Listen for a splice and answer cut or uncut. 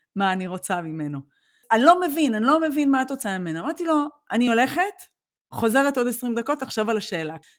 uncut